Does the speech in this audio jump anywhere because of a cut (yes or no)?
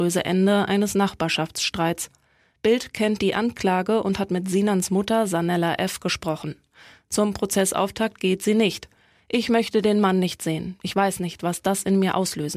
no